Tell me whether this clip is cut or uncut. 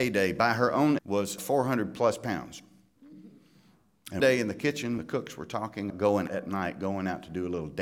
cut